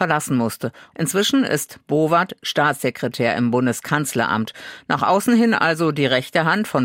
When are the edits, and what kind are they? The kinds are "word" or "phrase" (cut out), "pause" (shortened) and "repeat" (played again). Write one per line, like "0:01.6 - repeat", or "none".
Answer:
none

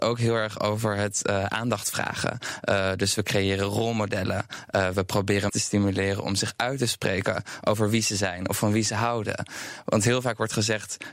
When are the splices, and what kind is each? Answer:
0:05.5 - word

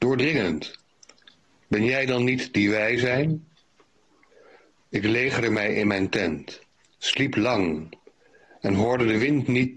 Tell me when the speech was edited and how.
0:01.3 - pause

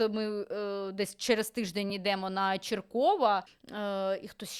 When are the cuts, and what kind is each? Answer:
none

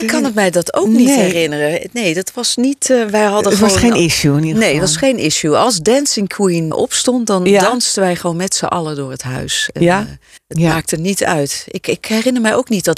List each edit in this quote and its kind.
0:06.7 - word
0:10.4 - pause

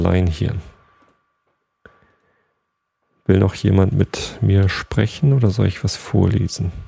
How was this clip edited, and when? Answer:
none

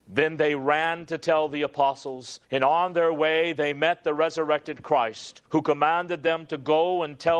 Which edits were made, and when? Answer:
0:02.4 - pause
0:05.5 - pause

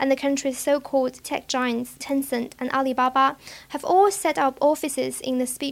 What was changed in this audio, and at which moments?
0:01.2 - word
0:02.0 - word

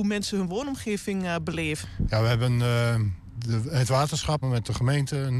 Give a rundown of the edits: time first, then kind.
0:04.4 - word

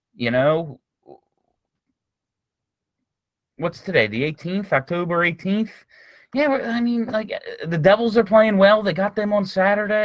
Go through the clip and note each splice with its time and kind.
none

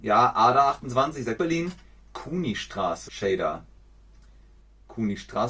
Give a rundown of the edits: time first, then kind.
0:01.4 - word
0:03.1 - word

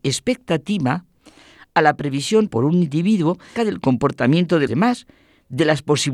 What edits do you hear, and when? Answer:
0:02.5 - word
0:03.6 - word
0:04.7 - word

